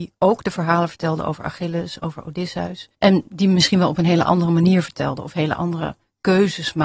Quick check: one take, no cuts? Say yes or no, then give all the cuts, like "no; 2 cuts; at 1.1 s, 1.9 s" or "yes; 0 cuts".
no; 1 cut; at 2.9 s